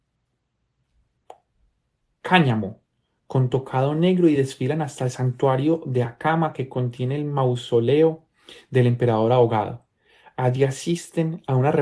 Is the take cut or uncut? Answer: uncut